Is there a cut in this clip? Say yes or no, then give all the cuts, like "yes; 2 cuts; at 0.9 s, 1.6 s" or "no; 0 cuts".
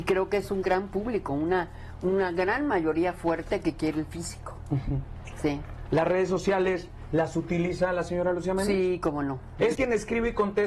yes; 1 cut; at 9.7 s